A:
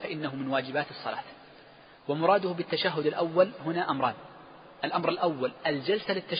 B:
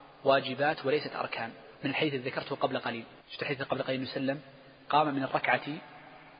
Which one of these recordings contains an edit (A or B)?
B